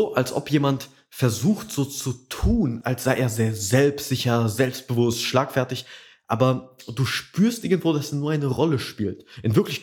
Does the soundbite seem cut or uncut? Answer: uncut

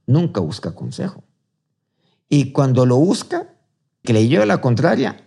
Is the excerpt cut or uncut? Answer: cut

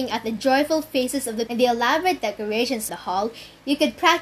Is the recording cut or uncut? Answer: cut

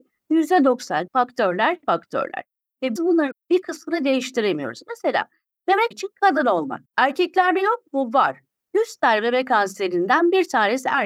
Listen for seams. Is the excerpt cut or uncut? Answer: cut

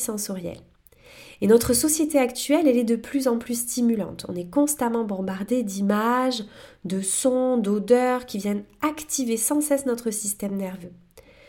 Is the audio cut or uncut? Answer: uncut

